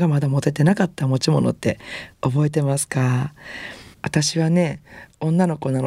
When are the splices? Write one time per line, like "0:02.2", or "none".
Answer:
0:03.9